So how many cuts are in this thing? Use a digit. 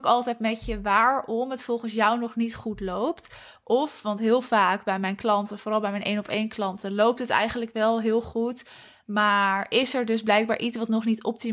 0